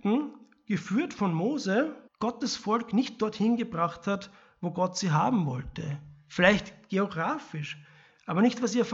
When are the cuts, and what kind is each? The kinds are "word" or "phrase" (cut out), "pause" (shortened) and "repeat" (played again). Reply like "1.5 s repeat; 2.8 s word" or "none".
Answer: 2.1 s pause